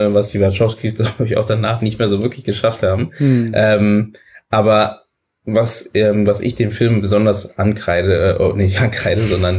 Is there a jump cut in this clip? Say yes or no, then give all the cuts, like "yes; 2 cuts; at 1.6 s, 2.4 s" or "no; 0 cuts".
no; 0 cuts